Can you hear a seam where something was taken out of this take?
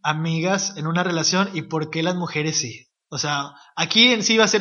no; 0 cuts

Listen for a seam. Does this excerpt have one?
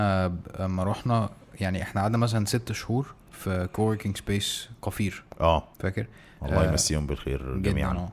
yes; 2 cuts; at 3.2 s, 5.7 s

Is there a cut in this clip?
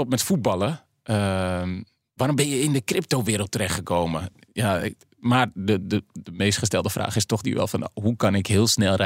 no; 0 cuts

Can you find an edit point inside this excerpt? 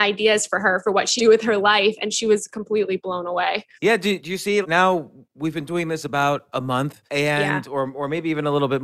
yes; 5 cuts; at 1.2 s, 3.7 s, 4.2 s, 4.6 s, 7.1 s

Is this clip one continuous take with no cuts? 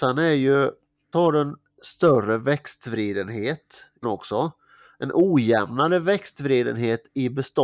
no; 2 cuts; at 1.1 s, 4.0 s

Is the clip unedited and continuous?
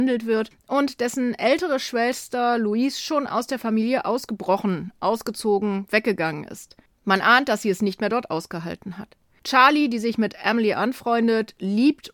yes; 0 cuts

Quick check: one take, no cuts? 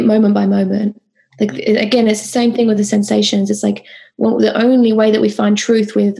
yes; 0 cuts

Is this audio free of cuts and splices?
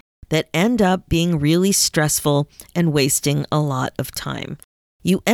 yes; 0 cuts

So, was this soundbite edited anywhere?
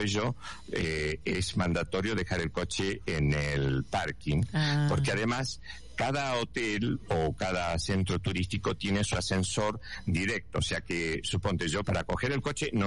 yes; 1 cut; at 11.8 s

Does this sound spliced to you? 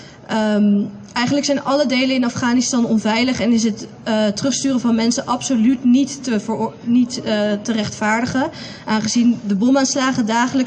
no; 0 cuts

